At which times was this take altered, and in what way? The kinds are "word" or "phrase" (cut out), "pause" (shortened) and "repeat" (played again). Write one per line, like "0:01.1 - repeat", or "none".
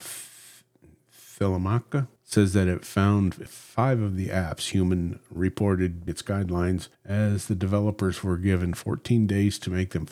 0:02.2 - pause
0:03.5 - word
0:06.1 - word
0:06.9 - pause

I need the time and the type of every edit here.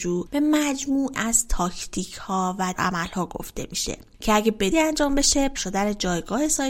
0:01.1 - word
0:02.7 - word
0:04.7 - word
0:05.5 - word

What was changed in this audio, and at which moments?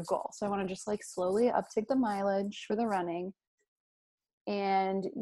none

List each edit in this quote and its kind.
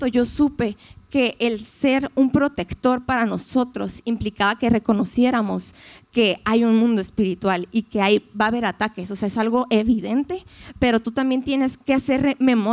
0:11.8 - word

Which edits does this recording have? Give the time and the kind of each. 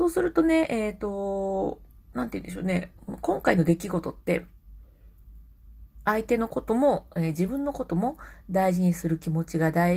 none

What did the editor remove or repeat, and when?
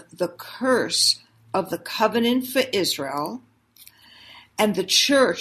none

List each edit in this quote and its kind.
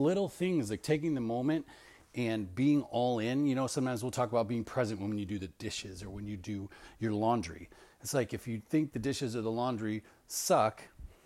none

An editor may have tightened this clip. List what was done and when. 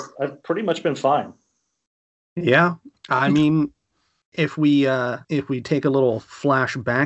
0:05.2 - pause

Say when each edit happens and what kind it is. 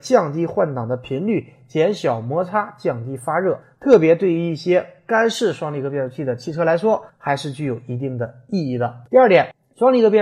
0:09.1 - pause

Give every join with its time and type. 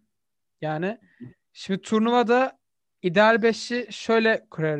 none

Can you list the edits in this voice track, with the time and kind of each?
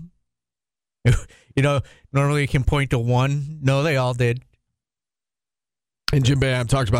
none

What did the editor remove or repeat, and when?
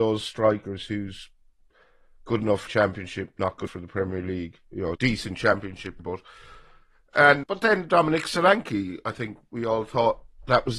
0:02.7 - word
0:03.7 - word
0:04.9 - word
0:06.0 - word
0:07.4 - word

